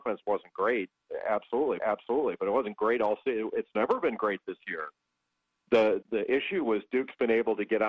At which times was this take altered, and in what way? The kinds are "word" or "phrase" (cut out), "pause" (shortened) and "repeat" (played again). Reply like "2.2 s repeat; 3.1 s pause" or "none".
1.8 s repeat; 6.0 s word